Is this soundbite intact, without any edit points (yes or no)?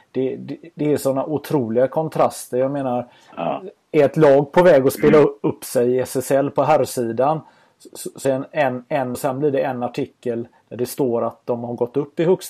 no